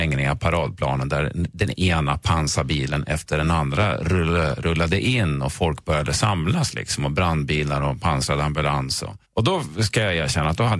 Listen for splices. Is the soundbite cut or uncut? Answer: cut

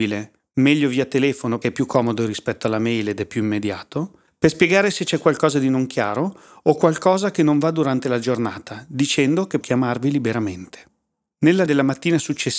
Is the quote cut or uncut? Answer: cut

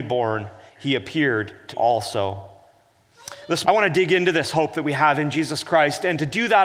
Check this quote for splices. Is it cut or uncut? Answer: cut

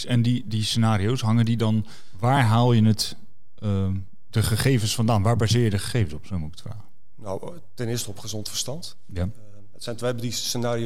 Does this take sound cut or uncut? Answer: uncut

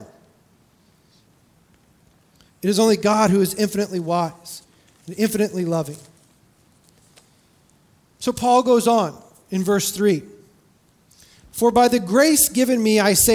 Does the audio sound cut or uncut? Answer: uncut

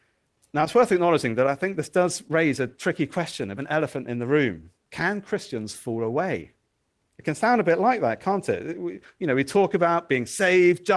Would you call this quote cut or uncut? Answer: cut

